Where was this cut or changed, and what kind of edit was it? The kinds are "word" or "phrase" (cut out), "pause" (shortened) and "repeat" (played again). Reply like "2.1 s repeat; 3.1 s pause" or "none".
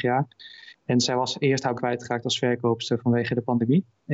1.0 s word; 1.7 s word